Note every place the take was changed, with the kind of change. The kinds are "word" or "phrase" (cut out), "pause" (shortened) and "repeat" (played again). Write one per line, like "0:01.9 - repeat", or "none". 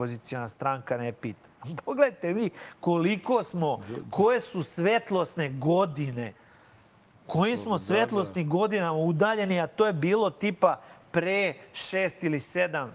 none

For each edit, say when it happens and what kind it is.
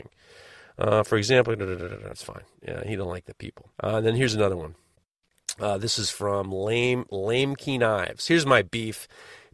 0:02.1 - word
0:03.7 - pause

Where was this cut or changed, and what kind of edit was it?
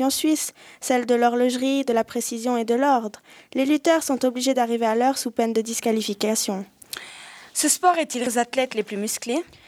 0:08.3 - word

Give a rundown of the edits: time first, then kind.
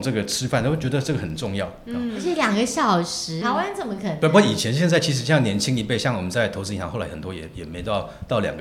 0:03.4 - word

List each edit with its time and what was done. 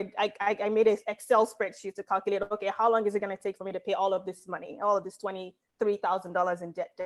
none

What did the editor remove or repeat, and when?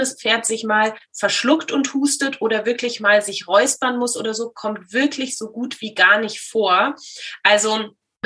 none

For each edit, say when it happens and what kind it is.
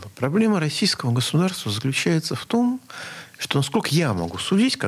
none

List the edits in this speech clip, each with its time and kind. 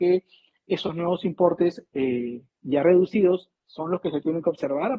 0:03.6 - pause

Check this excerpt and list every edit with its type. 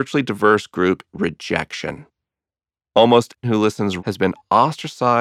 0:01.1 - word
0:03.4 - word
0:04.0 - word

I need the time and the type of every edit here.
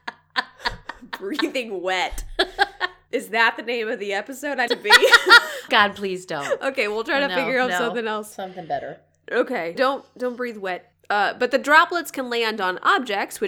0:04.7 - phrase
0:05.7 - word
0:09.7 - word

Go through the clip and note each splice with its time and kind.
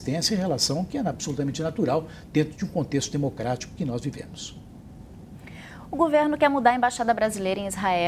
none

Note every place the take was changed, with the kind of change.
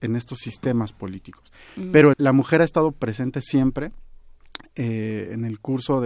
0:02.1 - word

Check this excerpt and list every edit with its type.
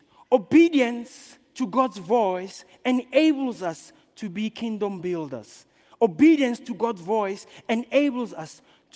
none

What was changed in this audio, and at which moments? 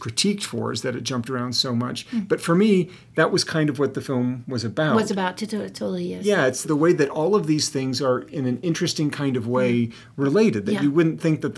0:06.6 - word

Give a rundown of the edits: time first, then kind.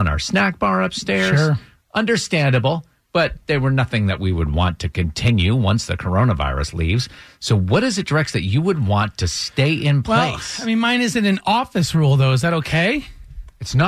none

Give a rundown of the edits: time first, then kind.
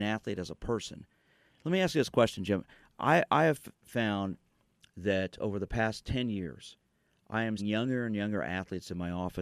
0:07.6 - word

